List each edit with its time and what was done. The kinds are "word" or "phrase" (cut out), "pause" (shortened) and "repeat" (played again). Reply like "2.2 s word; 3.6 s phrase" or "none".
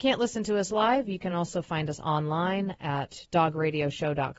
none